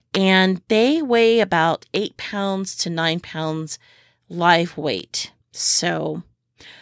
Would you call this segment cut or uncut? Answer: cut